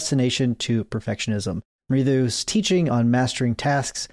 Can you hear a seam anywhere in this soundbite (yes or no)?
no